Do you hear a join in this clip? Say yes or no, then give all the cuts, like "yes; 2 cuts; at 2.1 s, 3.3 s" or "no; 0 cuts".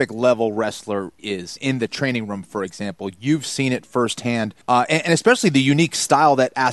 yes; 3 cuts; at 1.2 s, 1.6 s, 4.6 s